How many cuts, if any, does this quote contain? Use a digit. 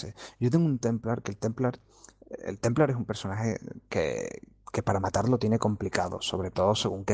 0